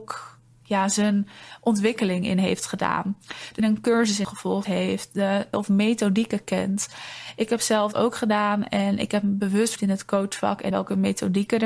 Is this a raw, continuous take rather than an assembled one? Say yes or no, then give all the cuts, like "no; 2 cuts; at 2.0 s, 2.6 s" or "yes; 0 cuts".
no; 7 cuts; at 3.6 s, 4.2 s, 4.6 s, 5.5 s, 7.9 s, 9.8 s, 10.7 s